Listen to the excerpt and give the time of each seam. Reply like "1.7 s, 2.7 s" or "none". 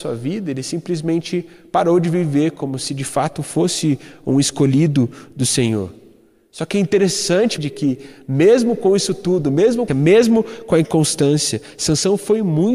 7.6 s, 9.9 s